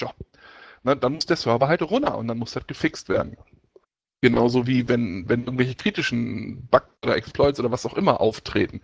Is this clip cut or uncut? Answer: uncut